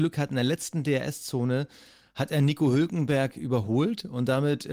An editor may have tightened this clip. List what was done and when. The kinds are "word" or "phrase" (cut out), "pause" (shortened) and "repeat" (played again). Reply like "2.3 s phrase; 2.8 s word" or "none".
none